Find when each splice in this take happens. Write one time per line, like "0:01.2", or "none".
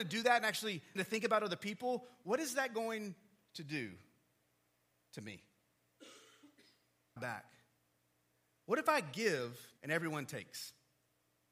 0:01.0
0:07.2
0:09.8